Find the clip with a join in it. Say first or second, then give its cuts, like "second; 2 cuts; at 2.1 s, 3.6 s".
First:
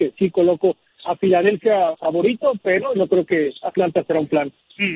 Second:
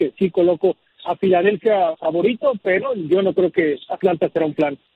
first; 1 cut; at 3.0 s